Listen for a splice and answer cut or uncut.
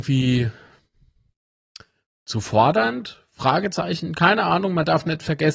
uncut